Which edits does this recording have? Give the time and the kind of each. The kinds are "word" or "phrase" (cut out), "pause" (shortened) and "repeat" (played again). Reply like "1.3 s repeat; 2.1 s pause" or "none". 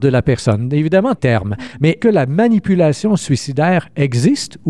1.2 s phrase; 2.0 s word